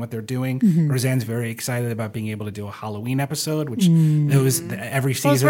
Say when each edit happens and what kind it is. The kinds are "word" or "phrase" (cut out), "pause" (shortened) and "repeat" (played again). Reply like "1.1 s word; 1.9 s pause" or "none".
none

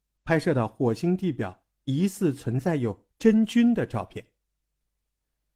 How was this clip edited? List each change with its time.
none

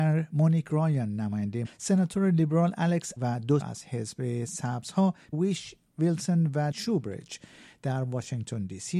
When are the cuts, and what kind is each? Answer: 1.6 s word; 3.2 s word; 3.6 s word; 5.3 s word; 6.7 s word

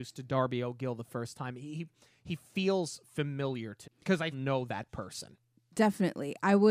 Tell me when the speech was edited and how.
3.8 s word; 4.3 s phrase

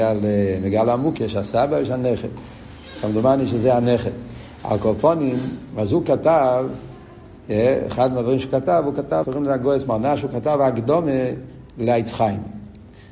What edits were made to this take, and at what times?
1.2 s word; 9.2 s word

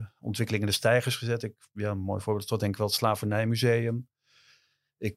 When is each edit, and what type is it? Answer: none

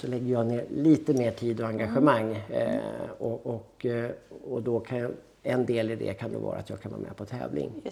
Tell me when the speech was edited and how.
none

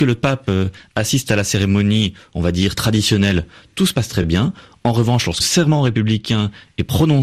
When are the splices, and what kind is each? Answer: 5.4 s word

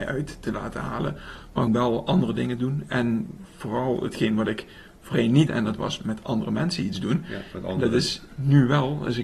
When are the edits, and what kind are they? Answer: 1.7 s word; 5.5 s word

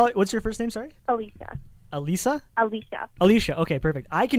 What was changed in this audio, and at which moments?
1.0 s pause; 2.5 s pause

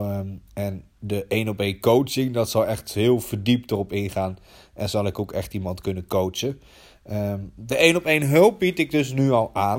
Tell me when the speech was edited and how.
none

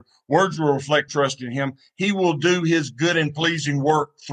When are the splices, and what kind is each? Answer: 1.1 s word

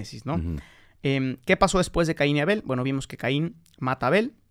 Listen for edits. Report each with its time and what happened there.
none

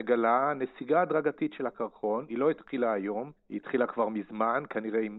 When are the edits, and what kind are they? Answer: 3.4 s pause

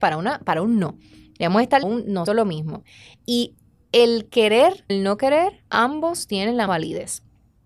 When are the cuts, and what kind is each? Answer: 1.8 s phrase; 2.3 s word; 4.9 s word; 5.7 s pause; 6.7 s word

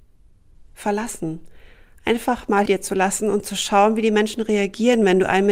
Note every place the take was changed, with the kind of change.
2.7 s word

